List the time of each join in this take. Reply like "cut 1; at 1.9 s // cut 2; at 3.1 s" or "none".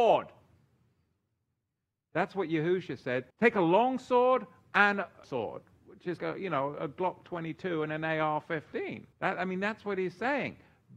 cut 1; at 3.3 s // cut 2; at 5.2 s // cut 3; at 6.2 s // cut 4; at 9.1 s